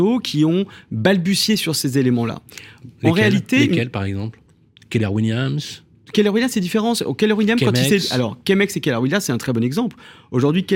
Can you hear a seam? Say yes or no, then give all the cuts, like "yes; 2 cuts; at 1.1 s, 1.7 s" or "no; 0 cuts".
no; 0 cuts